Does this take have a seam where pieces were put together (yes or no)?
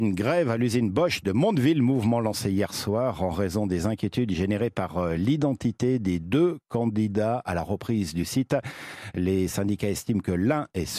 no